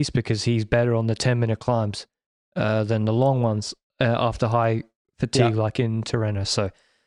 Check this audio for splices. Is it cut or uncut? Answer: uncut